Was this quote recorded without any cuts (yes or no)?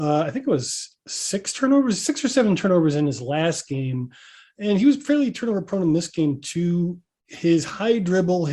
yes